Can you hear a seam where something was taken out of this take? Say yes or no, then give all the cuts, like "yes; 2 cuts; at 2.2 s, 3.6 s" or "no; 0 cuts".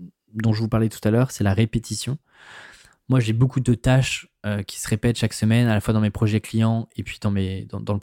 no; 0 cuts